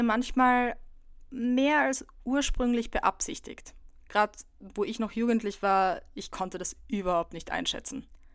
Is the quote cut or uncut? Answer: uncut